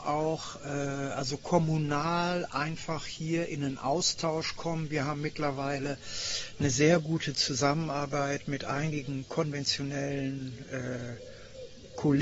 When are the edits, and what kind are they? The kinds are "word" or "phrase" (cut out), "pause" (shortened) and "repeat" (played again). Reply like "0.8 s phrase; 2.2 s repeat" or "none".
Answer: none

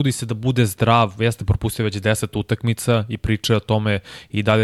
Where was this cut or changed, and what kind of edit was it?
none

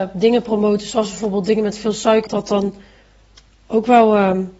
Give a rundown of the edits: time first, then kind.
2.3 s phrase

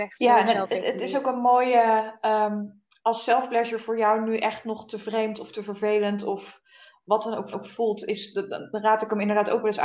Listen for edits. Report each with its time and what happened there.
7.5 s repeat

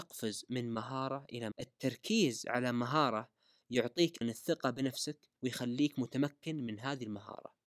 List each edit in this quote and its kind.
1.5 s word; 4.2 s word; 5.4 s pause

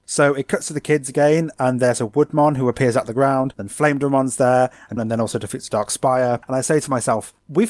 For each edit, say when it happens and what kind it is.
5.0 s phrase

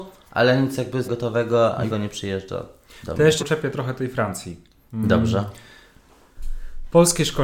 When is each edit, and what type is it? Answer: 1.0 s word; 1.9 s word; 3.4 s word

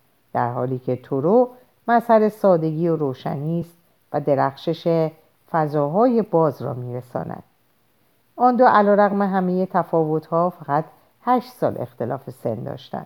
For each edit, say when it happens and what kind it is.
none

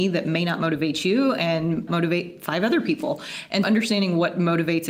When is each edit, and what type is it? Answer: 1.9 s phrase; 3.6 s word

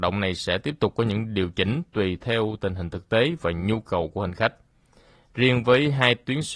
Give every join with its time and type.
none

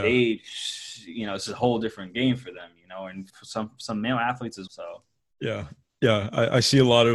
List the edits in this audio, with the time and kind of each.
3.3 s word; 4.7 s word

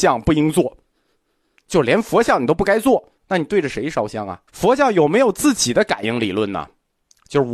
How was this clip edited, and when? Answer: 3.2 s pause; 4.5 s pause

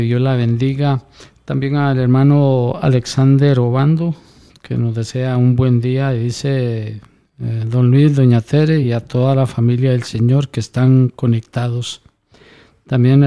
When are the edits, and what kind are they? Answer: none

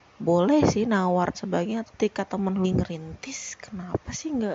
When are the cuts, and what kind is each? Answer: 1.3 s word; 1.8 s word; 2.6 s word

